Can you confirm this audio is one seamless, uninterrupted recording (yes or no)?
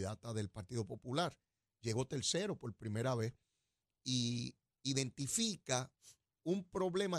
yes